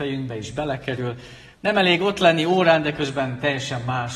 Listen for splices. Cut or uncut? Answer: cut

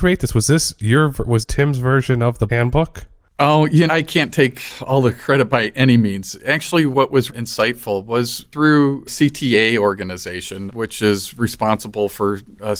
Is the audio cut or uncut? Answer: cut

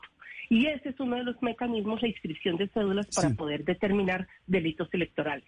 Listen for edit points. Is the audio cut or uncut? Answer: uncut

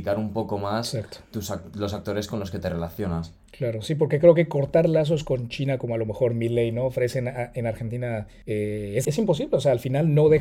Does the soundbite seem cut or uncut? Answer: cut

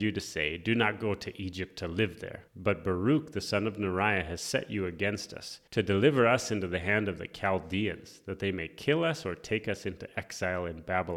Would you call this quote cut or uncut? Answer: cut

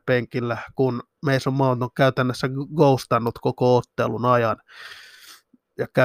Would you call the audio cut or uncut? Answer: uncut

